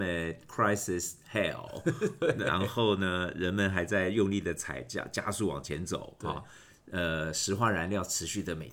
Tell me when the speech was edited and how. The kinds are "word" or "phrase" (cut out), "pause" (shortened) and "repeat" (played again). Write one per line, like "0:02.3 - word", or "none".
none